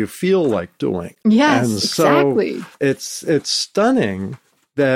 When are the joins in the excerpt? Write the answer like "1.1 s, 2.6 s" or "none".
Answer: 1.2 s, 2.7 s